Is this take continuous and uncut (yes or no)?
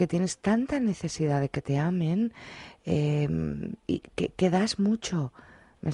no